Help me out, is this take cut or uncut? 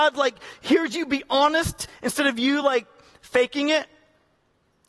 uncut